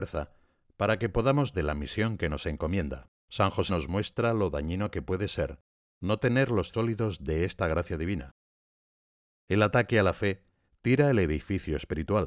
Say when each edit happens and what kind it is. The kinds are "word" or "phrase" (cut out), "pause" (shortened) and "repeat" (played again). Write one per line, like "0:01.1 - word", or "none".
0:01.5 - word
0:03.2 - pause
0:03.7 - word
0:06.7 - word